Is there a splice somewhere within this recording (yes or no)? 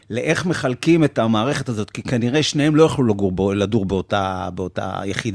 no